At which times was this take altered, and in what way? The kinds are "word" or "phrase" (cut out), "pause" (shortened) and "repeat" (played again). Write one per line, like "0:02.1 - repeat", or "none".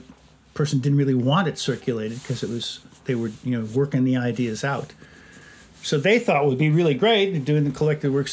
none